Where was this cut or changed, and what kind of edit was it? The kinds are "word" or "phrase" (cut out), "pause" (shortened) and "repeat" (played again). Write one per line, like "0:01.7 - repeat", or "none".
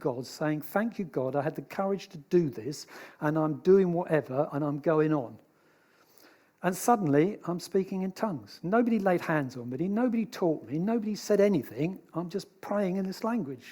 none